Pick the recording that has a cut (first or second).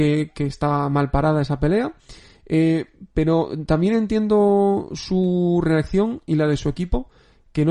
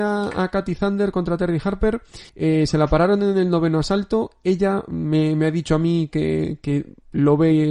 second